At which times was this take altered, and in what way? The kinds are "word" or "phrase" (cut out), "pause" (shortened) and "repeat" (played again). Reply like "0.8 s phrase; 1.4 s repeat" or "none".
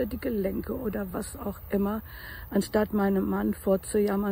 none